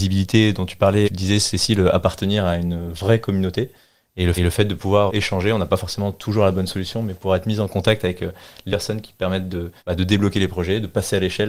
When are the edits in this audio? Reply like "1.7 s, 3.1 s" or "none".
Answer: 1.0 s, 4.4 s, 5.1 s, 8.7 s, 9.8 s

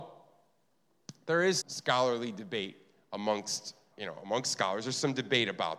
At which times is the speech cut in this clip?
1.6 s, 3.9 s

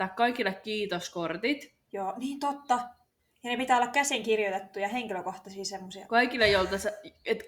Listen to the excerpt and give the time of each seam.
none

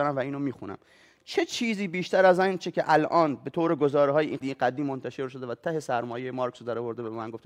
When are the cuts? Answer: 4.4 s

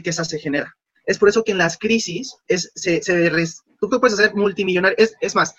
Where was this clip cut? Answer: none

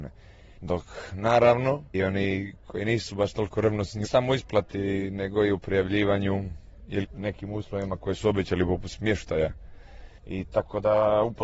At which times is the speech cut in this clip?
1.9 s, 4.0 s, 7.0 s

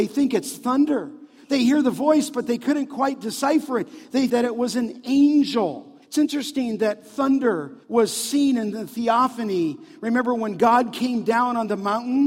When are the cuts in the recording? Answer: 4.3 s, 6.0 s, 7.8 s

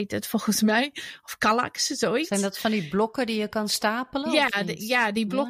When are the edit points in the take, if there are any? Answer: none

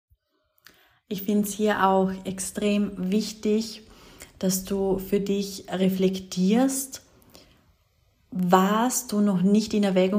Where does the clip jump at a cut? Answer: none

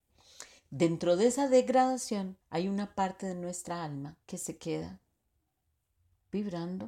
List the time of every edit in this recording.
2.4 s, 4.2 s

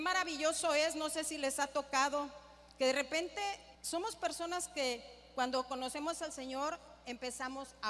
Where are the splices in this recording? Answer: 3.7 s

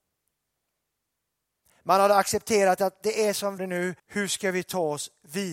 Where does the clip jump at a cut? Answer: 3.6 s, 4.0 s

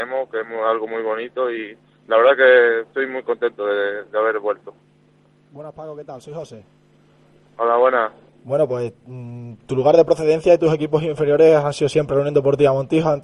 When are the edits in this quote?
none

